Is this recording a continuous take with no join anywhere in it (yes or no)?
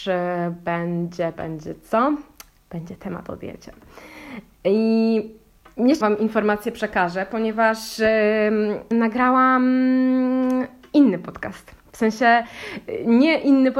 no